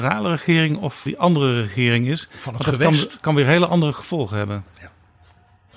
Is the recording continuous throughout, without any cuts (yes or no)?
no